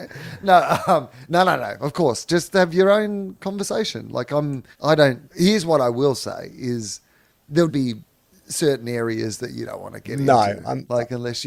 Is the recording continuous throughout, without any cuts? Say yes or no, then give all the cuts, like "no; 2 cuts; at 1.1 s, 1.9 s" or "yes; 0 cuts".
no; 3 cuts; at 4.7 s, 5.2 s, 7.7 s